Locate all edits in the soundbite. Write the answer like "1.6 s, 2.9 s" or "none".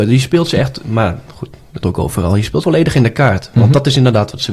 1.8 s, 2.6 s